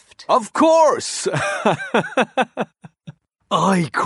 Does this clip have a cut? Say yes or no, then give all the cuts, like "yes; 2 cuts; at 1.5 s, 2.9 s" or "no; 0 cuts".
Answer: no; 0 cuts